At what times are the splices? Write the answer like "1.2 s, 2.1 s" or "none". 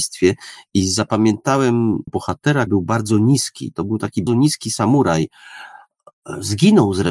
2.1 s, 2.7 s, 4.3 s